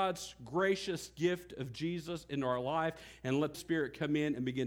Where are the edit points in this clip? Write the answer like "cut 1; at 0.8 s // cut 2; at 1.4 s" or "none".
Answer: cut 1; at 3.5 s